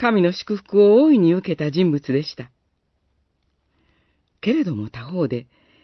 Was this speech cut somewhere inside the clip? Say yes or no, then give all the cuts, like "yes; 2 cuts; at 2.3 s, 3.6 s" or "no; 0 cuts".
no; 0 cuts